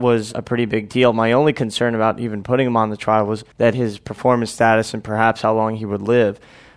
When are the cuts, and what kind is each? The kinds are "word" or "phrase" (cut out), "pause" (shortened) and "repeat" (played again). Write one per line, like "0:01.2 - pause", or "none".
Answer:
0:03.5 - pause